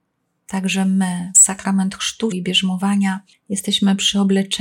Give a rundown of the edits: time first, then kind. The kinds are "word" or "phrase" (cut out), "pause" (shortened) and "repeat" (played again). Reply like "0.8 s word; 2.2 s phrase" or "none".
1.3 s word; 2.3 s word